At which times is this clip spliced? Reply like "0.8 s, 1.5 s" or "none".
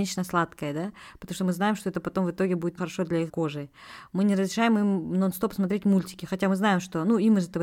2.8 s, 3.3 s